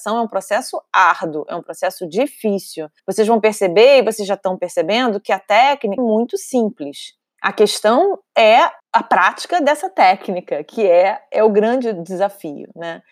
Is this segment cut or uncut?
cut